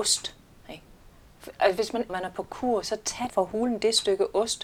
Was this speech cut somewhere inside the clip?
yes; 2 cuts; at 2.1 s, 3.3 s

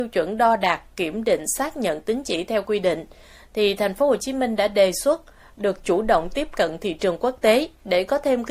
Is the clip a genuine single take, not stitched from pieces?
yes; 0 cuts

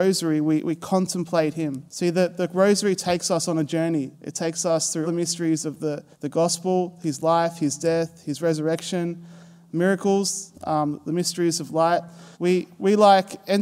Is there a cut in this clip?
yes; 5 cuts; at 1.9 s, 4.1 s, 5.0 s, 6.1 s, 12.3 s

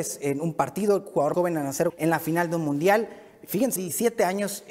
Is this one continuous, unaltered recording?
no; 3 cuts; at 1.3 s, 1.9 s, 3.8 s

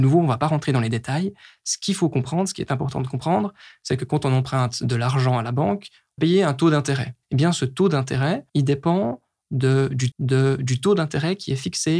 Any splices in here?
yes; 4 cuts; at 6.2 s, 7.2 s, 8.5 s, 10.1 s

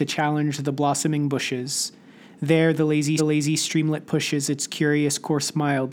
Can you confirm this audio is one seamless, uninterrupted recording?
no; 1 cut; at 3.2 s

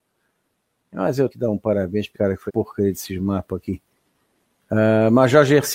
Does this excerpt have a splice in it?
yes; 3 cuts; at 1.3 s, 2.1 s, 2.5 s

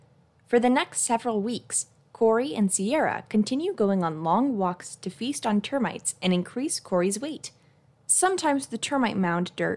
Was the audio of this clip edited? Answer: no; 0 cuts

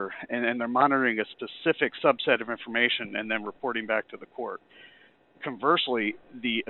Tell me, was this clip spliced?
no; 0 cuts

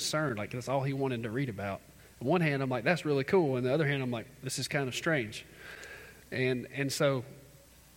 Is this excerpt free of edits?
yes; 0 cuts

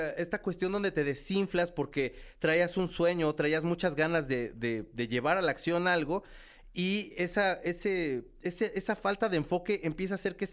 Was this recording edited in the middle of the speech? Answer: no; 0 cuts

